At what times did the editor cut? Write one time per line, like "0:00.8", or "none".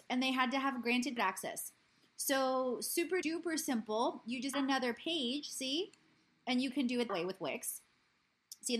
0:01.2
0:03.2
0:04.5
0:07.1